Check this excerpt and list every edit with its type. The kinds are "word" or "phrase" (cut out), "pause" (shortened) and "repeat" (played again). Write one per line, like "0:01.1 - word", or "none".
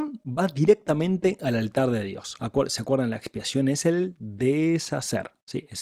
none